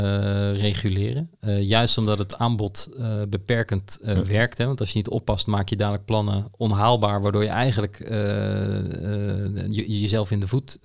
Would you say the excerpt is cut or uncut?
uncut